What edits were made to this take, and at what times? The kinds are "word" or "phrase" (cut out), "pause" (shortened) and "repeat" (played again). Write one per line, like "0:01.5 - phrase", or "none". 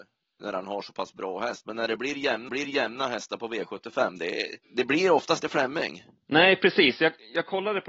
0:02.5 - repeat
0:04.6 - pause
0:05.4 - word